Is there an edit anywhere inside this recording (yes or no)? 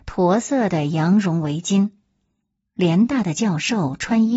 no